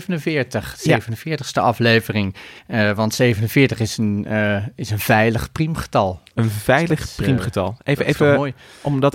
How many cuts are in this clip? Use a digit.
1